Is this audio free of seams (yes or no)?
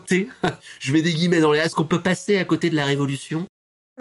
yes